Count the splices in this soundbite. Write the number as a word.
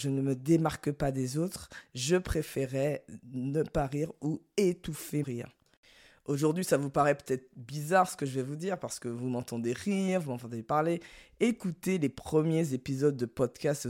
one